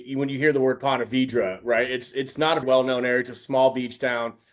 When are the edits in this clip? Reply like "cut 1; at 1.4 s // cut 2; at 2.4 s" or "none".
cut 1; at 2.6 s

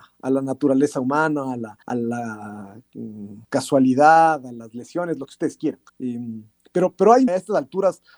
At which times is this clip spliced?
cut 1; at 1.8 s // cut 2; at 3.4 s // cut 3; at 5.9 s // cut 4; at 7.3 s

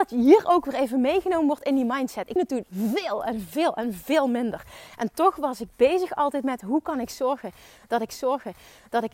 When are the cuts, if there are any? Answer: cut 1; at 2.4 s // cut 2; at 8.1 s

